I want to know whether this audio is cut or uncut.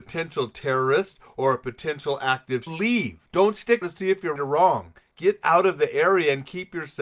cut